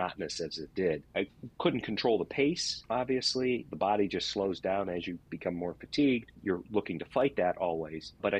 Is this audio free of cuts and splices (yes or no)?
yes